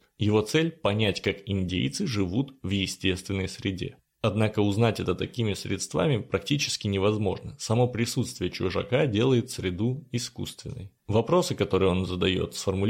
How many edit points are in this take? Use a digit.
0